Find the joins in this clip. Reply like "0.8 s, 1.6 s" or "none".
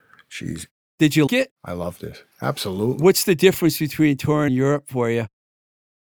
1.3 s, 2.3 s, 4.5 s